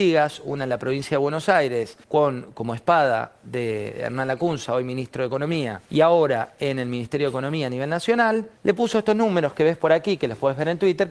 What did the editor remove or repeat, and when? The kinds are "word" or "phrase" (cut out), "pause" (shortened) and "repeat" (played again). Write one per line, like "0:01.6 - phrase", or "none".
0:02.0 - pause
0:05.8 - pause
0:08.6 - pause